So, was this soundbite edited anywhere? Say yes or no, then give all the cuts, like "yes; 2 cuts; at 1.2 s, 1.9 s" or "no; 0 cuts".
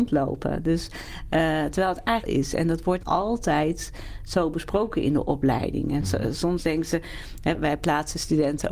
yes; 3 cuts; at 2.2 s, 3.0 s, 7.5 s